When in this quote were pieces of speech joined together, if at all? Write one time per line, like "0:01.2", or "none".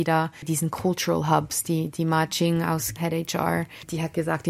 0:03.0